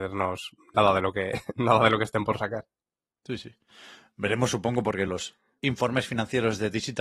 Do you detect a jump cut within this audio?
no; 0 cuts

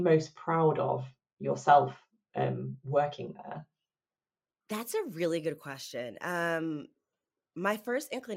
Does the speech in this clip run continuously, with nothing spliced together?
yes; 0 cuts

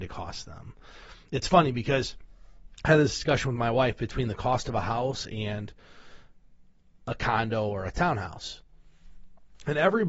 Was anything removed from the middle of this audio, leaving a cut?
no; 0 cuts

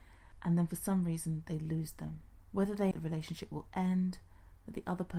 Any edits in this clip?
yes; 1 cut; at 2.9 s

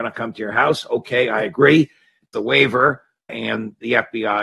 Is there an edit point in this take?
yes; 2 cuts; at 2.3 s, 3.3 s

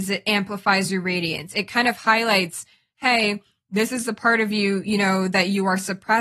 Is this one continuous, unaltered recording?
yes; 0 cuts

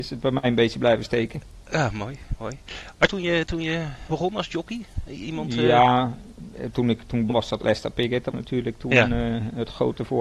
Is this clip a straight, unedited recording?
no; 5 cuts; at 3.1 s, 4.1 s, 7.3 s, 7.6 s, 8.3 s

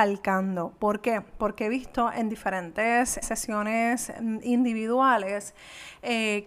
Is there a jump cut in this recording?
yes; 1 cut; at 3.2 s

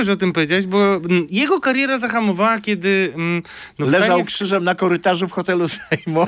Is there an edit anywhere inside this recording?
no; 0 cuts

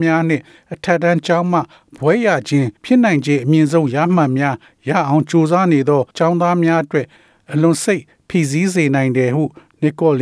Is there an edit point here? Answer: yes; 2 cuts; at 2.8 s, 6.1 s

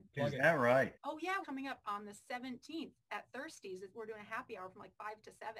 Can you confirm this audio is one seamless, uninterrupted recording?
no; 2 cuts; at 1.0 s, 1.4 s

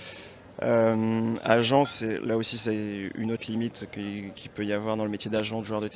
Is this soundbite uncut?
yes; 0 cuts

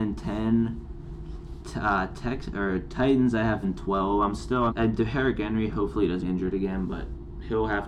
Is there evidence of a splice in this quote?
yes; 3 cuts; at 3.6 s, 4.7 s, 6.2 s

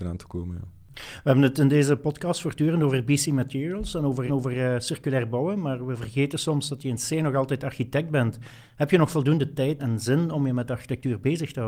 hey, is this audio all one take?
no; 2 cuts; at 4.3 s, 9.8 s

